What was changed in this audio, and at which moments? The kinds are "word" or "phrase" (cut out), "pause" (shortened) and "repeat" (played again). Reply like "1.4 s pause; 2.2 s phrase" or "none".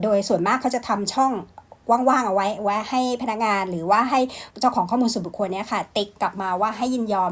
4.5 s pause; 6.2 s pause